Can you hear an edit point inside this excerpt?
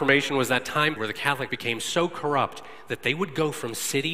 yes; 2 cuts; at 1.0 s, 1.5 s

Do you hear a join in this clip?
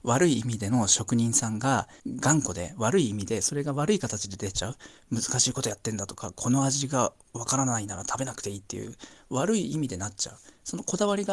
yes; 1 cut; at 2.0 s

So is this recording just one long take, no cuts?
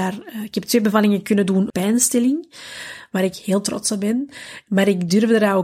no; 1 cut; at 1.7 s

